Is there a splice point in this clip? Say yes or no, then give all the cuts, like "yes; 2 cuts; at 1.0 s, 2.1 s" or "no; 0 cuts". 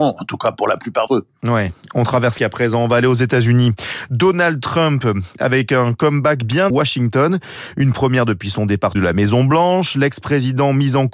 yes; 4 cuts; at 1.1 s, 2.4 s, 6.7 s, 8.9 s